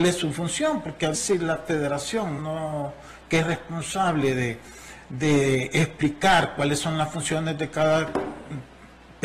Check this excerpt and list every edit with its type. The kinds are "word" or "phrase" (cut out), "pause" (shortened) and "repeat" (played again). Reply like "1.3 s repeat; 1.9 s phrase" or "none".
1.1 s word; 2.4 s word; 3.4 s word